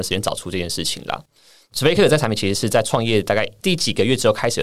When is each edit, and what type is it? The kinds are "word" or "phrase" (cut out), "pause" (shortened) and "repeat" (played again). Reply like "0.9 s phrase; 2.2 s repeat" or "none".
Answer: none